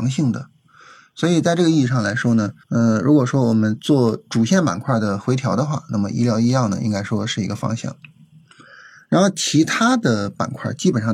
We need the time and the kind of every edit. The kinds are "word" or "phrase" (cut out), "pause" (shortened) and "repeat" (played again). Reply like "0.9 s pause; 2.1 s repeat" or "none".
2.6 s pause